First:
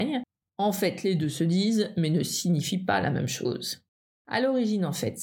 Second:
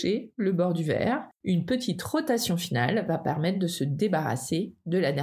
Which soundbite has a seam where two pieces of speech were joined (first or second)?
second